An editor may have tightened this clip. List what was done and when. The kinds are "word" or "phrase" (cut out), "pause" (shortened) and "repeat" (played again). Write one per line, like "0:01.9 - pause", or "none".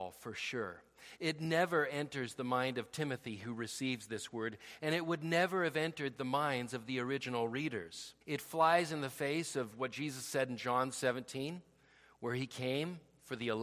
0:08.2 - pause

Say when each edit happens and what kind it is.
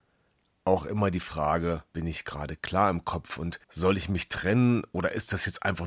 0:01.9 - pause
0:03.6 - pause

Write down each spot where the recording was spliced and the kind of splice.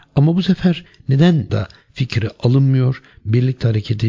0:01.5 - word

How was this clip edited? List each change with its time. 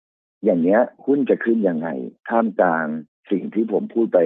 0:01.0 - pause
0:03.1 - pause

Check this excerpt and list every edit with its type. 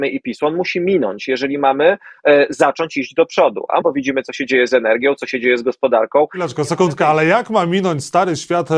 0:03.8 - word

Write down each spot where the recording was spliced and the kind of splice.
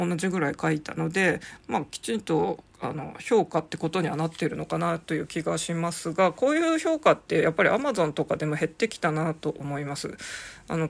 0:02.7 - pause

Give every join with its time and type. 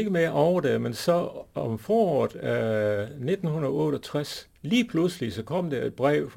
0:04.5 - pause

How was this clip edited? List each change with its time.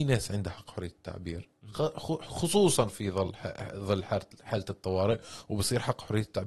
none

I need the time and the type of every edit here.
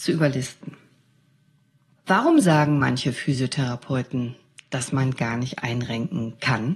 none

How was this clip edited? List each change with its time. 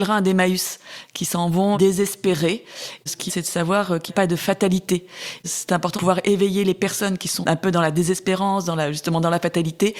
0:01.7 - word
0:03.3 - word
0:04.1 - word
0:05.9 - word
0:07.4 - word

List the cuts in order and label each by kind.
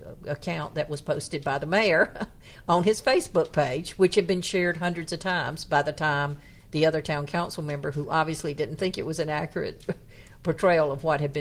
none

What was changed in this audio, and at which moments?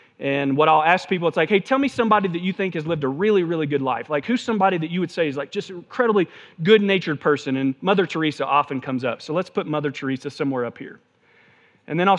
none

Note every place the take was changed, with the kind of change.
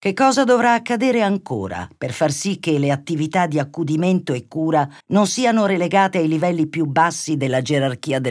0:05.0 - pause

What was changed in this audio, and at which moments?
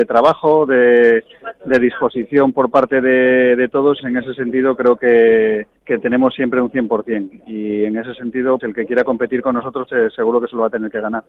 0:04.0 - phrase
0:05.8 - pause
0:08.6 - word
0:09.9 - word

